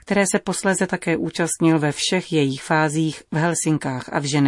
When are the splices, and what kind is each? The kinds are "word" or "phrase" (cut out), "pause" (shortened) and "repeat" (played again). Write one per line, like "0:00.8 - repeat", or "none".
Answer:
none